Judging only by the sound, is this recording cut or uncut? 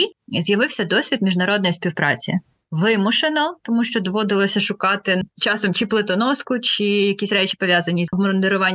uncut